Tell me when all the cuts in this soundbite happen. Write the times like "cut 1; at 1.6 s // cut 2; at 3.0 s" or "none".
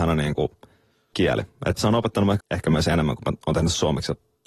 cut 1; at 1.1 s // cut 2; at 1.8 s // cut 3; at 2.4 s